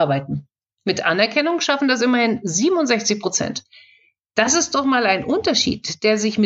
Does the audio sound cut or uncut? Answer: uncut